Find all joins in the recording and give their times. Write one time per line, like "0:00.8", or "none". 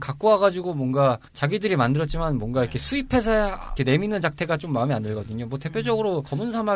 0:01.3
0:03.8